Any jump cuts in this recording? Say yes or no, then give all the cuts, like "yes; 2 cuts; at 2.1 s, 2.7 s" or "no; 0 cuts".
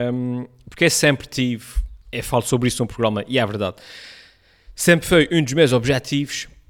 yes; 1 cut; at 2.0 s